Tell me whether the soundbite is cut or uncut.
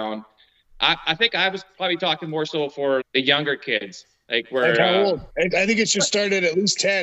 cut